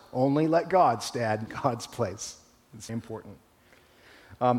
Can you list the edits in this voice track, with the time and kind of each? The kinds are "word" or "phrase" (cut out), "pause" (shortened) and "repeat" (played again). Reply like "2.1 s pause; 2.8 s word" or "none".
1.5 s word; 2.9 s word